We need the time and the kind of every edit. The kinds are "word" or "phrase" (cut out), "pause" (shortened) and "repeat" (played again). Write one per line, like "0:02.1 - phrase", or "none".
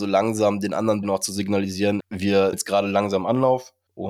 0:01.0 - word
0:02.0 - word
0:02.5 - word

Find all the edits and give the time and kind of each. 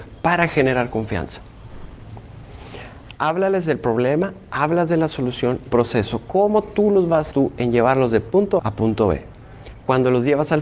0:05.7 - phrase
0:07.3 - phrase
0:08.6 - word

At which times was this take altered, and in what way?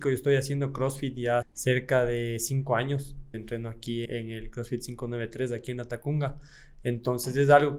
0:01.4 - word
0:03.3 - word
0:04.0 - word

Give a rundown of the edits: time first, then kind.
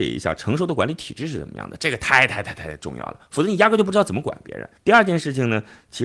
0:04.8 - pause

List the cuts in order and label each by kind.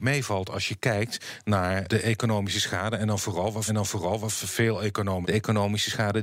0:01.8 - word
0:03.7 - repeat
0:05.2 - word

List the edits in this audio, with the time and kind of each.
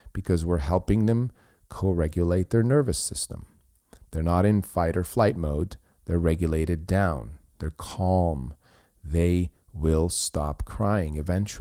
none

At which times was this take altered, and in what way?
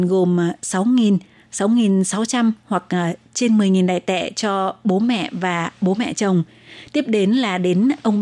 none

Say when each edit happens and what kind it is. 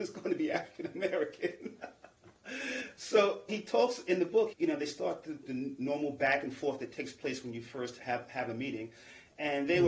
0:03.5 - word
0:04.5 - phrase
0:08.0 - word

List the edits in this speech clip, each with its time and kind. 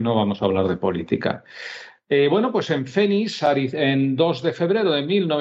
none

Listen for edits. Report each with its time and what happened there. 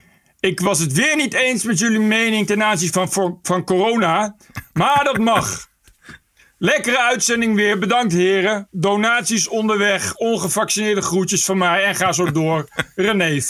none

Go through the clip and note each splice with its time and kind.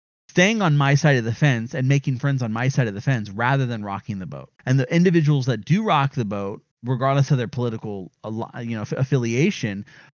0:04.6 - pause
0:06.7 - pause

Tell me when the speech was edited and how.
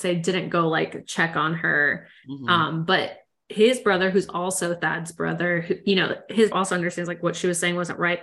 0:06.5 - phrase

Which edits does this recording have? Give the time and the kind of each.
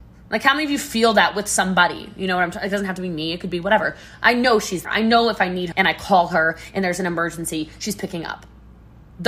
0:04.8 - word
0:05.7 - word

